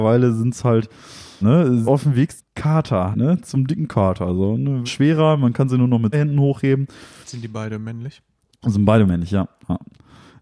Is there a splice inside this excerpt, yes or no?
yes